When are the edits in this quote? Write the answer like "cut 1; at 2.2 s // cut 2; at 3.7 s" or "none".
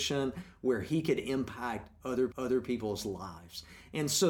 cut 1; at 2.3 s